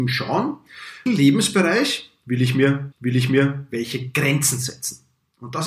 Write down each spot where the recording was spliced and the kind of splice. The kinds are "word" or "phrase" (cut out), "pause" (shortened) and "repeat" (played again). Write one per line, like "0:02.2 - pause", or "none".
0:01.1 - word
0:02.9 - repeat